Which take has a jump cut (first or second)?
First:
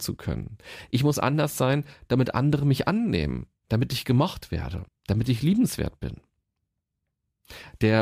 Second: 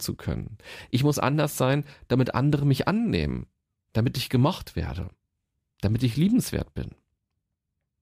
first